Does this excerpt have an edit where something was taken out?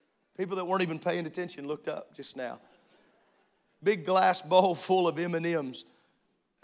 no; 0 cuts

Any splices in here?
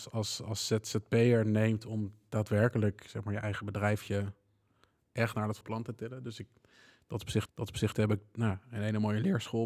yes; 2 cuts; at 5.6 s, 7.5 s

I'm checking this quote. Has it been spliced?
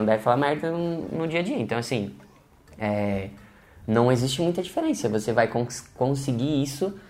no; 0 cuts

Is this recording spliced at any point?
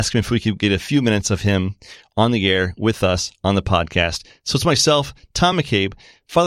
no; 0 cuts

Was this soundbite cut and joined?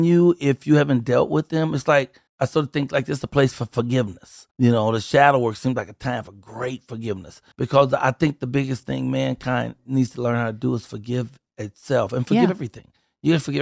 yes; 3 cuts; at 2.3 s, 4.5 s, 7.5 s

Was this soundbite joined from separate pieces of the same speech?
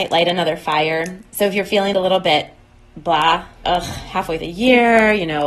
yes; 3 cuts; at 1.9 s, 3.6 s, 4.4 s

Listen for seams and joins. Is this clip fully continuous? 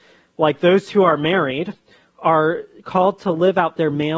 yes; 0 cuts

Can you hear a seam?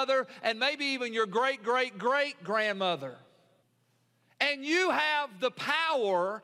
yes; 1 cut; at 3.6 s

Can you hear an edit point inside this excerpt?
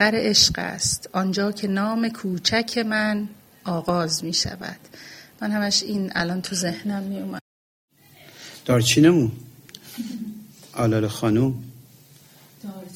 no; 0 cuts

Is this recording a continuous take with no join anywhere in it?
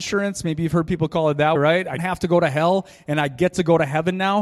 no; 2 cuts; at 1.6 s, 2.0 s

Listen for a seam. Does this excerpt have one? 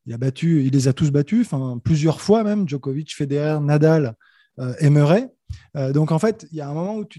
no; 0 cuts

